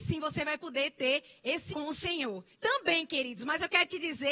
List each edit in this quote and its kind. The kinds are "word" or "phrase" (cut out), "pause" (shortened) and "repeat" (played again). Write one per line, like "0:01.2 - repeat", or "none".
0:01.7 - word
0:02.5 - pause